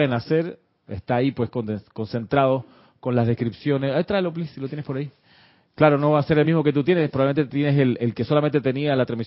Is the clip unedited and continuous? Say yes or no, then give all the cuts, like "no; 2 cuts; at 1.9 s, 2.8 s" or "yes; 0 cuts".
yes; 0 cuts